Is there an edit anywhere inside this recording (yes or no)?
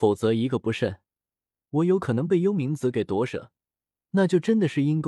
no